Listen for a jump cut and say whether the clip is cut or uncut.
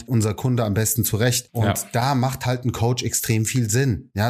uncut